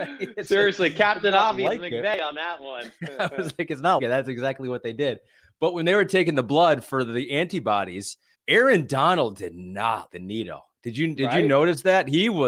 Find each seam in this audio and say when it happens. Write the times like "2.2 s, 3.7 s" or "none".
4.0 s, 8.3 s, 10.1 s

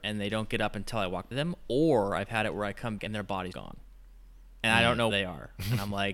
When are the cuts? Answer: 1.3 s, 3.0 s, 3.5 s, 5.1 s

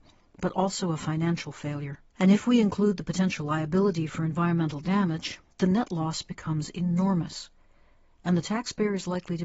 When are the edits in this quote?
2.1 s, 5.5 s

